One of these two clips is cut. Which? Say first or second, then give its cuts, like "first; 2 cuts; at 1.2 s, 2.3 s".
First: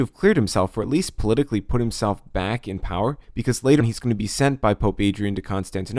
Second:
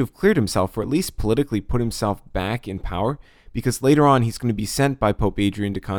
first; 2 cuts; at 3.2 s, 3.8 s